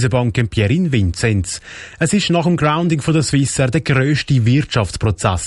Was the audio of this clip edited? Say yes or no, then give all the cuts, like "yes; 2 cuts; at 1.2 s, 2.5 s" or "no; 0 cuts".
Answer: no; 0 cuts